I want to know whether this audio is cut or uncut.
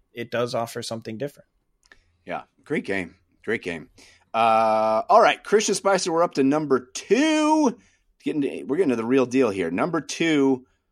uncut